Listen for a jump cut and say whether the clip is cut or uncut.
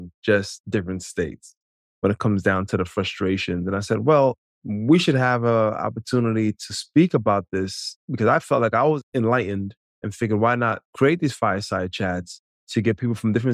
uncut